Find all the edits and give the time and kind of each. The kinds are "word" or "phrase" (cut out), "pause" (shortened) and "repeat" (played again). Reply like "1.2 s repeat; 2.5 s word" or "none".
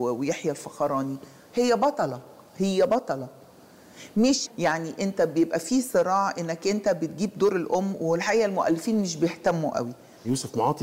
4.5 s word